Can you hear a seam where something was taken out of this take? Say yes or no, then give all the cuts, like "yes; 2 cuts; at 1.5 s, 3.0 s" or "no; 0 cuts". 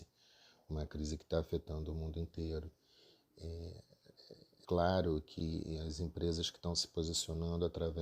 yes; 1 cut; at 4.6 s